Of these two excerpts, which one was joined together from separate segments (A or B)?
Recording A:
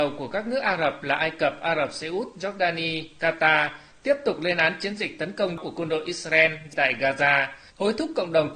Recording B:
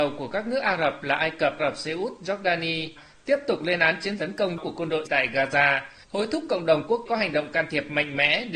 B